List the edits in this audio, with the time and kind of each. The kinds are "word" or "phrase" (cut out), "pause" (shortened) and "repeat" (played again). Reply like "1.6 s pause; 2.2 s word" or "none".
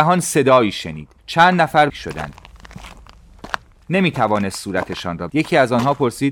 1.2 s pause; 1.9 s phrase; 5.3 s word